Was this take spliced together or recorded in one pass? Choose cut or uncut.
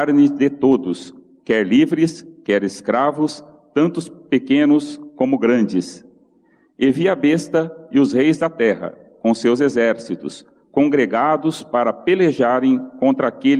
uncut